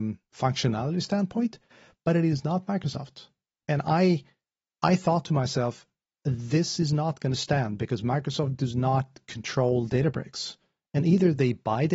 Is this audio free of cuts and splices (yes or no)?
yes